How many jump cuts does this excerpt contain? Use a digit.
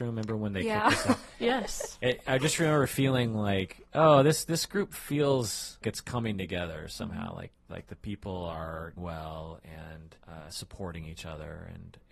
3